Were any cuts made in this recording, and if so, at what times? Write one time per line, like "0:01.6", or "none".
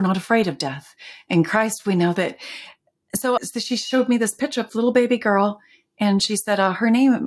0:03.4
0:04.7